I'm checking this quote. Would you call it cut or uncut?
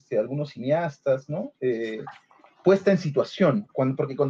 uncut